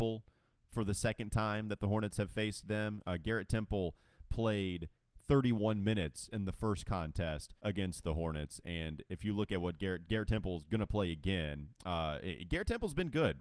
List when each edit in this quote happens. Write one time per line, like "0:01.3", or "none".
0:07.6